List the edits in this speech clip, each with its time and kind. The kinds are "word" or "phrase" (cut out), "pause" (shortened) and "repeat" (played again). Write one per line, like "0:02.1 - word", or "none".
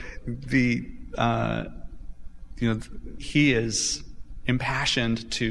0:03.2 - word

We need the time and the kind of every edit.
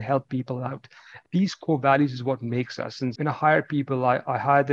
0:03.2 - word

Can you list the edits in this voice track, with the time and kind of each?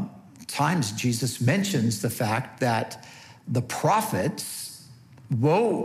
none

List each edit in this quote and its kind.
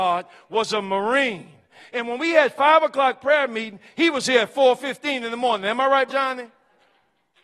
0:06.1 - word

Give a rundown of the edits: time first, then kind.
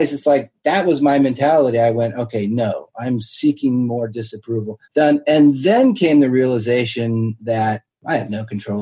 0:04.8 - pause

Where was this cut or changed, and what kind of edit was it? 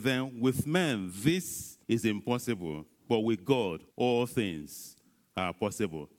0:01.8 - pause
0:03.0 - pause
0:03.9 - pause

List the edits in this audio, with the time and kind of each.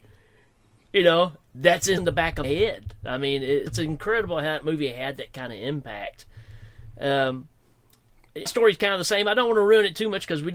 0:02.0 - word
0:02.4 - word
0:03.7 - word
0:08.5 - word

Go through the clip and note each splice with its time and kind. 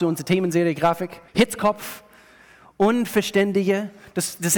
0:01.3 - pause

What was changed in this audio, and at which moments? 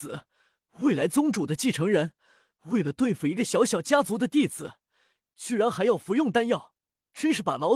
none

